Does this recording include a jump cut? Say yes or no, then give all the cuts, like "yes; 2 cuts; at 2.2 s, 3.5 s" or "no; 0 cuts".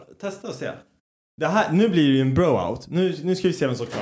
no; 0 cuts